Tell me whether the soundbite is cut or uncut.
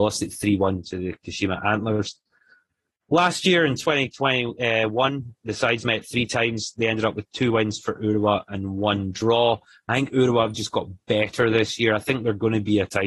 uncut